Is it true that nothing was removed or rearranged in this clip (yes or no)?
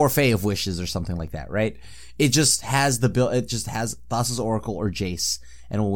yes